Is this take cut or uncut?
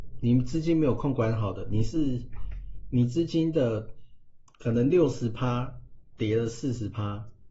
cut